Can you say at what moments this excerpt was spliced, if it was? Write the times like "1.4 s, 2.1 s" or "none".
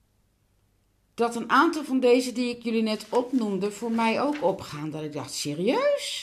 none

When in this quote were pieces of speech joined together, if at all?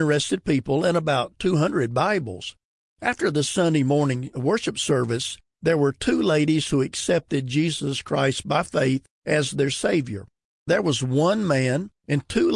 none

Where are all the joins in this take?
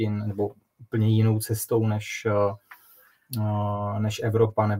none

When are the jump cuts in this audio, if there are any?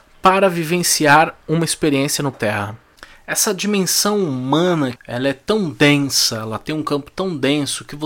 2.3 s, 5.0 s

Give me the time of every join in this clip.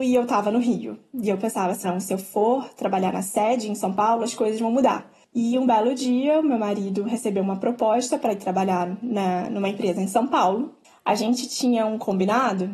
1.8 s

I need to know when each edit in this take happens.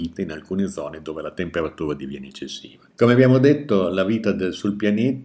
2.9 s

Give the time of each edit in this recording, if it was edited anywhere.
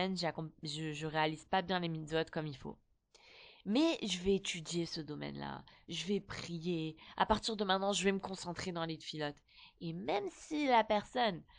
none

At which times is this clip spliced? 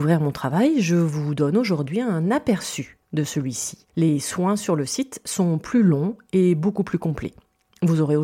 3.0 s, 3.9 s

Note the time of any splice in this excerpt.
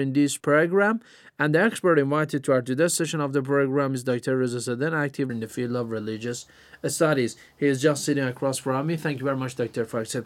5.3 s

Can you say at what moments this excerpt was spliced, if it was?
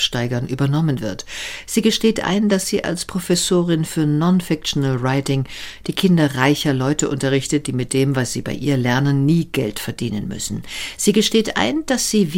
none

